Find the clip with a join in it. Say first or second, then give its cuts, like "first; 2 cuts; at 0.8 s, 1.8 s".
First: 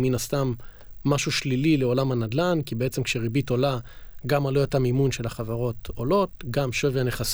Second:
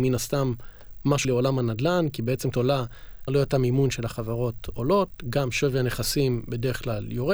second; 3 cuts; at 1.2 s, 2.5 s, 3.3 s